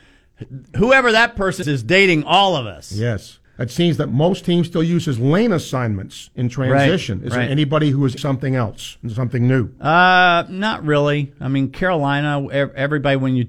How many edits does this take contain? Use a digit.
3